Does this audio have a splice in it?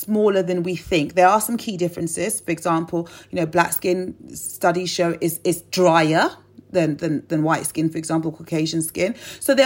no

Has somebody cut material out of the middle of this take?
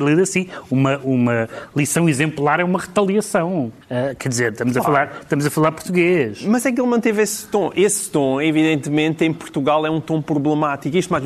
yes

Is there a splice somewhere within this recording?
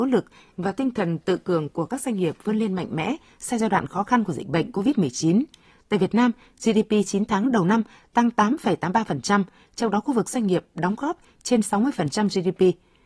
no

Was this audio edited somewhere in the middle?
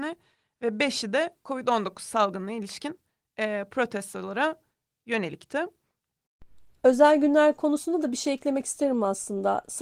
no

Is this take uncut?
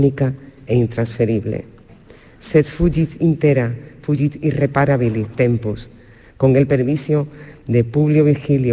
yes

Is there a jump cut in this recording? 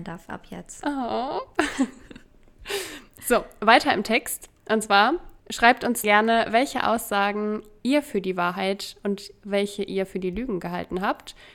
yes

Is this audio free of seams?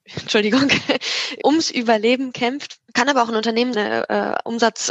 no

